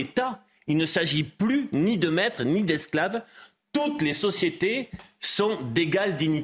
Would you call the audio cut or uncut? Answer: uncut